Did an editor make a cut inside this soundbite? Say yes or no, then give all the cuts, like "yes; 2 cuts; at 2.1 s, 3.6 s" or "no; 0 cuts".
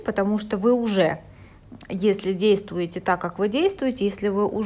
no; 0 cuts